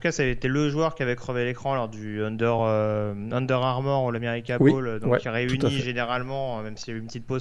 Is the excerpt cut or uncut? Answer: uncut